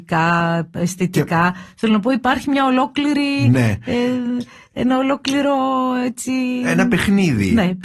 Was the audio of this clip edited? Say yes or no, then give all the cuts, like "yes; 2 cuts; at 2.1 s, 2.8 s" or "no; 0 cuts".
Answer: no; 0 cuts